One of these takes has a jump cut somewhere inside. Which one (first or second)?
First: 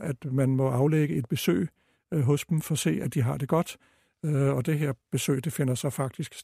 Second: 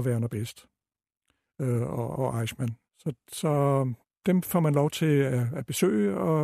second